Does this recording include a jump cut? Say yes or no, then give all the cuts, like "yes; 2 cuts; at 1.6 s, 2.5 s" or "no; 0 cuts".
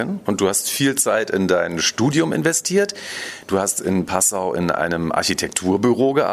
no; 0 cuts